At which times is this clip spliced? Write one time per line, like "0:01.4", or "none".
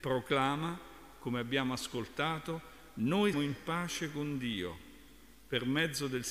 0:03.3